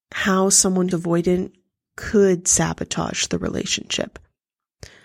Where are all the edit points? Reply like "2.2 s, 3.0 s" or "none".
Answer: 0.9 s